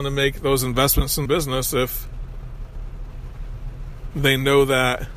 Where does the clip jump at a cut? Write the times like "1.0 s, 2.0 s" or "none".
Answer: 1.3 s

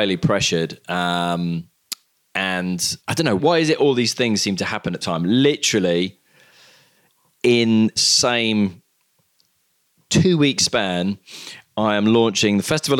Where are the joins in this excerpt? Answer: 3.0 s, 3.4 s, 5.0 s, 8.0 s

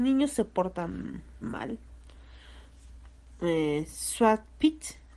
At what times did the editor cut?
1.4 s

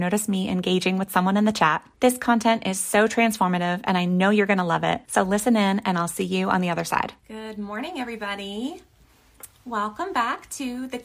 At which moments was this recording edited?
1.9 s, 5.0 s, 7.2 s

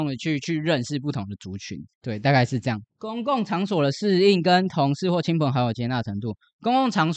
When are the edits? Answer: 1.9 s, 2.9 s

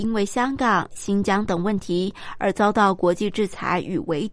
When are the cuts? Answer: 0.9 s

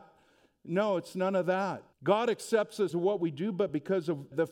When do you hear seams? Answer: 1.9 s, 2.9 s

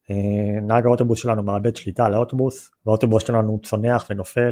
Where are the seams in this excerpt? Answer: 2.8 s

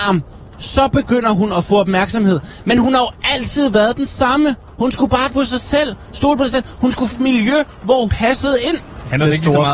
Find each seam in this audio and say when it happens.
5.3 s, 7.1 s, 8.1 s

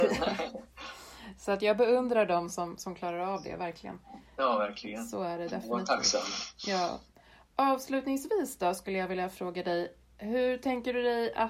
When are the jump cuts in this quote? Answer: none

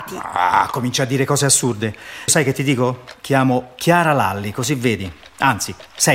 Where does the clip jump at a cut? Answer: 2.3 s

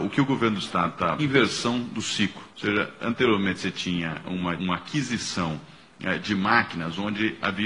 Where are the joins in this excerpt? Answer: 1.2 s, 2.5 s, 4.6 s

